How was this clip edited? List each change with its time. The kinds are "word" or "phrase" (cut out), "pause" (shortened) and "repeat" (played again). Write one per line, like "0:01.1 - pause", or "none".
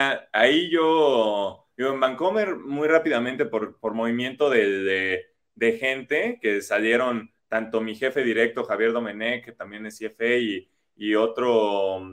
none